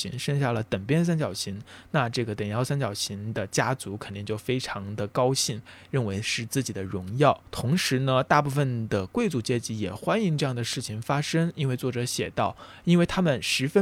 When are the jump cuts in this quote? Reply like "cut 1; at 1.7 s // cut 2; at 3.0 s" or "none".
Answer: cut 1; at 7.5 s